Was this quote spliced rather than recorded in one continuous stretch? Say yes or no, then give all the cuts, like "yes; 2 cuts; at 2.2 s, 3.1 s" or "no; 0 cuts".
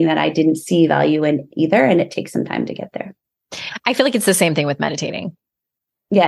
no; 0 cuts